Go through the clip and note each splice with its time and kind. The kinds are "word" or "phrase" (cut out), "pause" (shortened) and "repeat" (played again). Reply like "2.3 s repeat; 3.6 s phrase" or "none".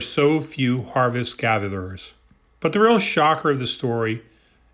2.5 s pause